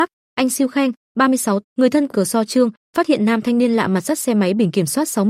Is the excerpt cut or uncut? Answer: cut